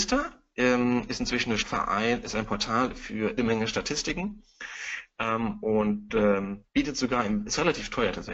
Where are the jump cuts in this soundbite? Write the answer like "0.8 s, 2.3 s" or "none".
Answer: 1.6 s, 3.4 s, 6.7 s